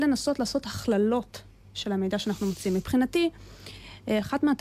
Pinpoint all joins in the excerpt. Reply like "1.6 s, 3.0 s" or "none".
none